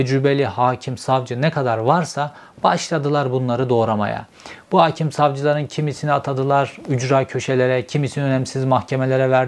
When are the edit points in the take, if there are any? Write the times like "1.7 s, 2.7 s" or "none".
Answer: none